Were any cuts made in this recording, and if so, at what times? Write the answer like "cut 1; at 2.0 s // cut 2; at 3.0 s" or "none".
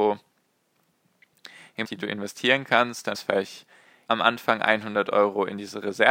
cut 1; at 1.8 s // cut 2; at 3.1 s // cut 3; at 4.1 s